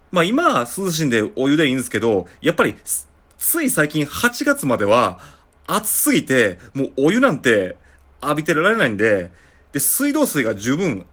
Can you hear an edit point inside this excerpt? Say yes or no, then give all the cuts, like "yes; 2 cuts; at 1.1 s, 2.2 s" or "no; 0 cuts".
no; 0 cuts